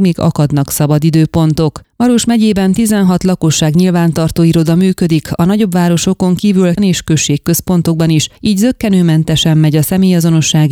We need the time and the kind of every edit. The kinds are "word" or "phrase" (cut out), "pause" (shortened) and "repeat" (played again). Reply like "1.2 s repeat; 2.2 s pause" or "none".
6.8 s word; 8.4 s pause

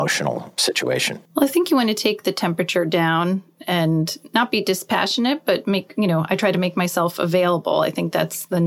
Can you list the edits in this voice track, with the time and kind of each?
1.3 s pause

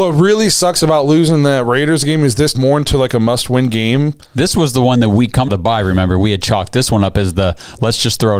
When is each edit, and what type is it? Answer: 2.5 s word; 5.5 s word

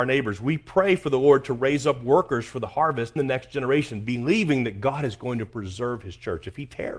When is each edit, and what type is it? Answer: 3.2 s word

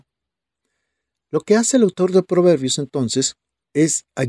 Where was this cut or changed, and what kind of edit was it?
none

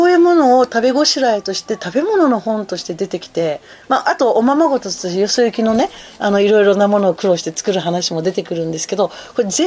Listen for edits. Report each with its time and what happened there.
none

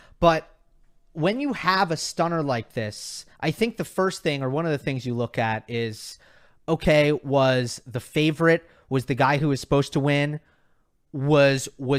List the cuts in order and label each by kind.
3.3 s pause

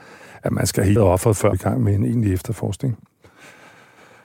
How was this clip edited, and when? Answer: 1.0 s word; 1.5 s phrase

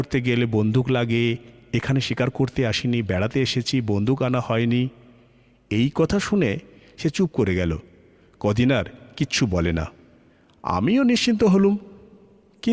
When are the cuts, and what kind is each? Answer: none

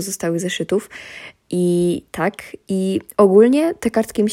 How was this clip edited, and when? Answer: none

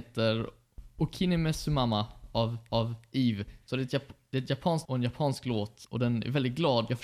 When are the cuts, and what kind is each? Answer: 2.7 s repeat; 4.8 s word; 5.8 s pause

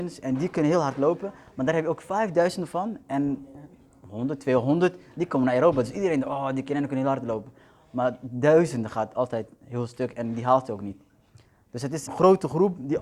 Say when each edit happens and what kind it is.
12.1 s word

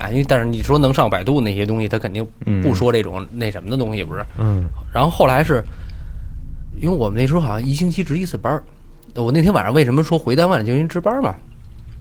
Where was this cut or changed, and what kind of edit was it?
3.3 s word; 6.7 s word

